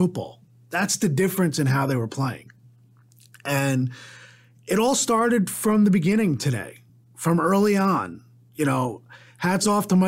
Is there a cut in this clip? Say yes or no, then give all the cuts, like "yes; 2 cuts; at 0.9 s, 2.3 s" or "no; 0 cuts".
no; 0 cuts